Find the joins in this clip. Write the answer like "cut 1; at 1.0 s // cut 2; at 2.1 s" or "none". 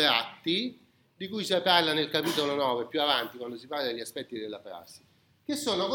none